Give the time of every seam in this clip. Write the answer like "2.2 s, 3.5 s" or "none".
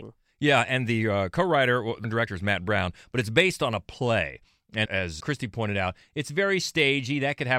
2.0 s, 4.9 s, 5.2 s